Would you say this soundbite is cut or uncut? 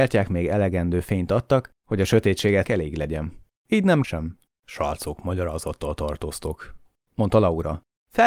cut